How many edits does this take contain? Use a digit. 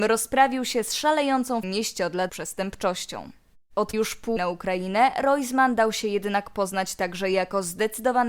4